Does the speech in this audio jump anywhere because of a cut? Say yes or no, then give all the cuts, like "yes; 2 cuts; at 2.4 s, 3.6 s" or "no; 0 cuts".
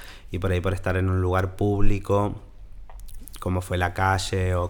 no; 0 cuts